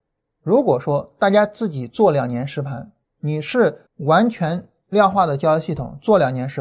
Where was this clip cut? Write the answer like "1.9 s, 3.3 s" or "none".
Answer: 3.9 s